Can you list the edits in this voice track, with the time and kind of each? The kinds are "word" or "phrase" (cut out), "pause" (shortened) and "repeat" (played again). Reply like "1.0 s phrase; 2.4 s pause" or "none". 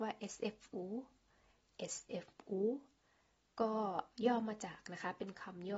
none